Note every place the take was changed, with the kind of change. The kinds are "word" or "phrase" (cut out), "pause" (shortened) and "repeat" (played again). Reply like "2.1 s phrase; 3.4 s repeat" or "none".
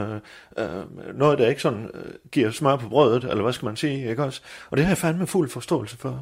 none